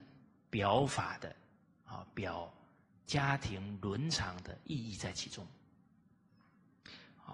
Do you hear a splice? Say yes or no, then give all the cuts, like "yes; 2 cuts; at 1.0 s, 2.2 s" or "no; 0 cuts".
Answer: no; 0 cuts